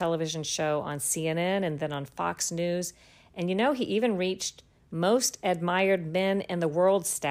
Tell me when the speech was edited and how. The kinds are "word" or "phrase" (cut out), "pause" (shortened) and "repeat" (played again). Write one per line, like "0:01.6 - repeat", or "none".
none